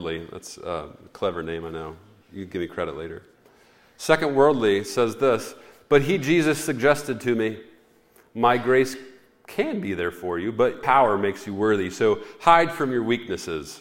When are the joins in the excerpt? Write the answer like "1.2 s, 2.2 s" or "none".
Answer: 10.8 s